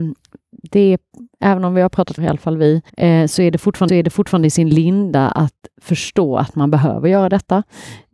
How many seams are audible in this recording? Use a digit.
3